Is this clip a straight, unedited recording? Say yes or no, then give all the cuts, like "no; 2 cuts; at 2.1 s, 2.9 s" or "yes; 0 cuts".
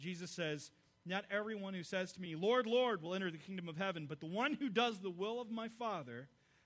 yes; 0 cuts